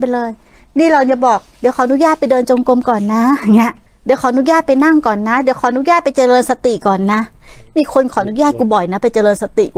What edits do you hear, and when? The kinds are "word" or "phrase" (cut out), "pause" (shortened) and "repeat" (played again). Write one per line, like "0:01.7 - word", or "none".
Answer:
0:03.9 - pause